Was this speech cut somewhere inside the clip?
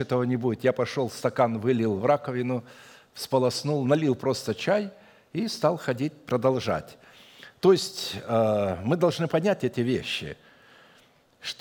no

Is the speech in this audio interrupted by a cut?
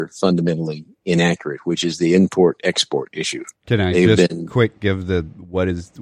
yes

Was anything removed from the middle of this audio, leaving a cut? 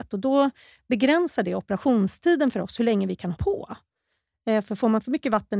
yes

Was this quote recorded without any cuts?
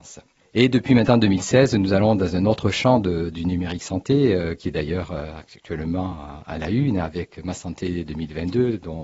yes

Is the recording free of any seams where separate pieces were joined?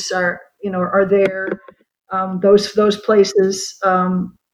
yes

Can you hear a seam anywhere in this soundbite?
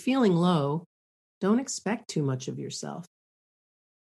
no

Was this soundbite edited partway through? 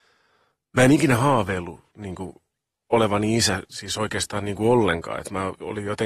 no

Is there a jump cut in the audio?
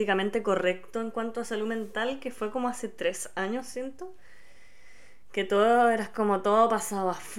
no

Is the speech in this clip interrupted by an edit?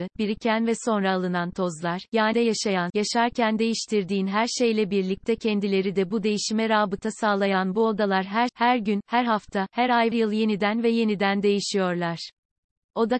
yes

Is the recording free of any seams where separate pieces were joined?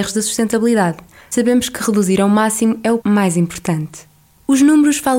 no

